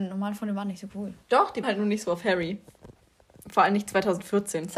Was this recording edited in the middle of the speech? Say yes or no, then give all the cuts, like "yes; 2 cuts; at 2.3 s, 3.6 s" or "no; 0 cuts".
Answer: yes; 2 cuts; at 1.2 s, 1.6 s